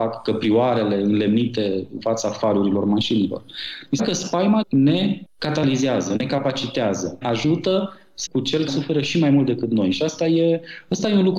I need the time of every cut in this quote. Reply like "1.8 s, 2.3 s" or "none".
2.0 s, 4.0 s, 4.6 s, 7.2 s, 8.3 s, 8.7 s